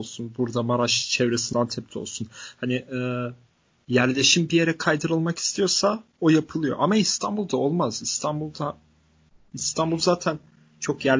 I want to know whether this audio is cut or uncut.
cut